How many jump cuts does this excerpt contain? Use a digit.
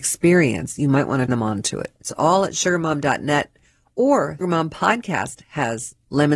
3